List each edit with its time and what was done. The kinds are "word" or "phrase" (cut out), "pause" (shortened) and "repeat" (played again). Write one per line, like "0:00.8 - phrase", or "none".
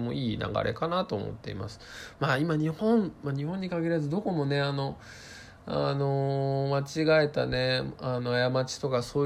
none